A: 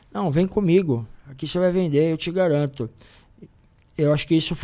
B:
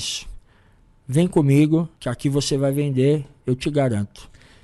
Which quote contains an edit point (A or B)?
B